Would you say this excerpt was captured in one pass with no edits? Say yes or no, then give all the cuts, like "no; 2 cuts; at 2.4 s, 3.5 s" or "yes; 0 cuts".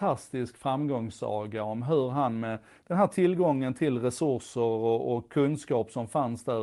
yes; 0 cuts